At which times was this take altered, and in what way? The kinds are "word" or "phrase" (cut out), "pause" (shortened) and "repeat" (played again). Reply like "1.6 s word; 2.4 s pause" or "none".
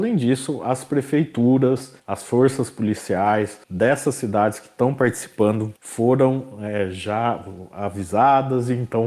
2.0 s pause; 3.6 s pause; 5.8 s pause